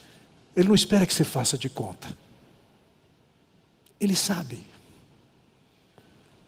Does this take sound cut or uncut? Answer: uncut